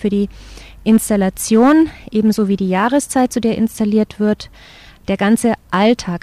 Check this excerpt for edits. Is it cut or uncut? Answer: uncut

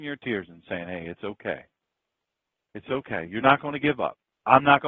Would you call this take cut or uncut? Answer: uncut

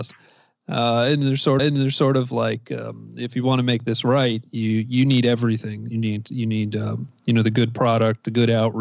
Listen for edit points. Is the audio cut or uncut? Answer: cut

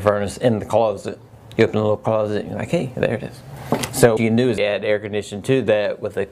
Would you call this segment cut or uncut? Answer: cut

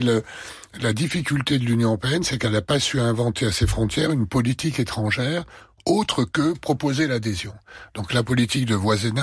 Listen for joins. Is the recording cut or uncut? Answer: uncut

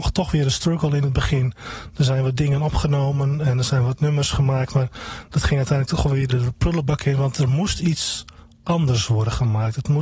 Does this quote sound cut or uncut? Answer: cut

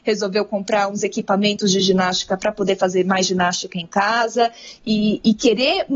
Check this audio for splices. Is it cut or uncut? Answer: uncut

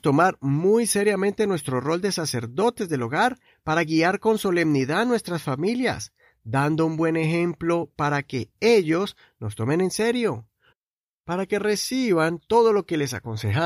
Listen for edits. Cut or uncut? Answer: uncut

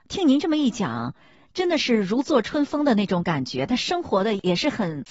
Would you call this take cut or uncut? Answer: uncut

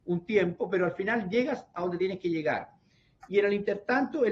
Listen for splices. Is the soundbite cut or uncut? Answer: uncut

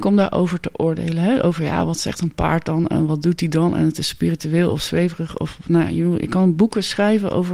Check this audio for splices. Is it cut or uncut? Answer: uncut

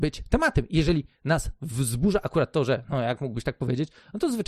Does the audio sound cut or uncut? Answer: uncut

